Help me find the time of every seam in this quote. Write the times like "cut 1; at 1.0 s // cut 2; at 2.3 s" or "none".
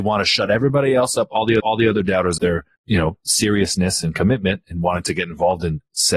cut 1; at 1.6 s // cut 2; at 2.4 s // cut 3; at 2.8 s